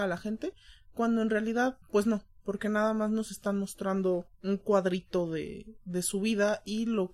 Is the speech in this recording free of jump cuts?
no; 2 cuts; at 1.8 s, 4.3 s

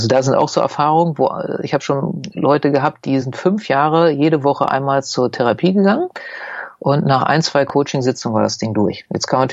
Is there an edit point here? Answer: no; 0 cuts

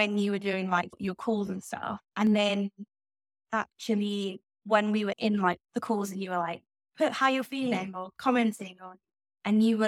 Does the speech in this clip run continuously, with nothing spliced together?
no; 4 cuts; at 2.0 s, 4.5 s, 5.1 s, 5.6 s

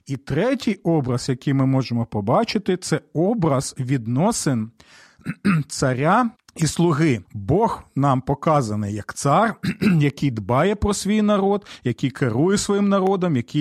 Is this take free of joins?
no; 2 cuts; at 6.3 s, 7.2 s

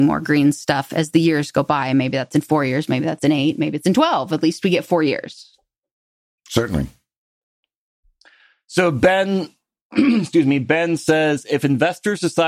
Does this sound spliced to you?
no; 0 cuts

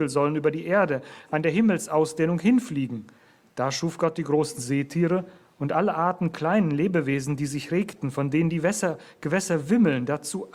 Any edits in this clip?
no; 0 cuts

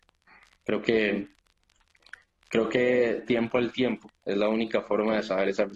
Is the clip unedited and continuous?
yes; 0 cuts

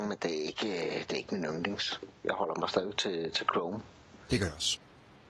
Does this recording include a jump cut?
no; 0 cuts

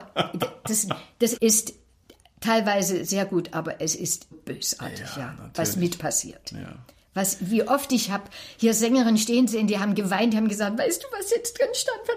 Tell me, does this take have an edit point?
yes; 3 cuts; at 1.4 s, 4.3 s, 6.0 s

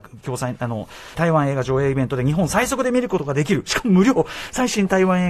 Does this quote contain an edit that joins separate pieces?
yes; 1 cut; at 1.1 s

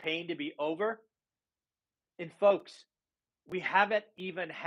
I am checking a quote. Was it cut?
no; 0 cuts

